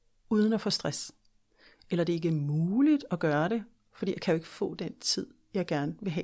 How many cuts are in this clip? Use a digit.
0